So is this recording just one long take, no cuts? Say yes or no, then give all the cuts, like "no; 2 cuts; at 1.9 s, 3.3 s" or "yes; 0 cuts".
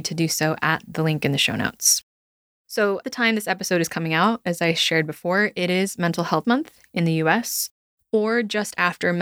no; 2 cuts; at 3.0 s, 6.4 s